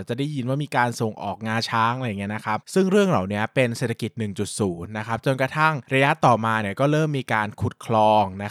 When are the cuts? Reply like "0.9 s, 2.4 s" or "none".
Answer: none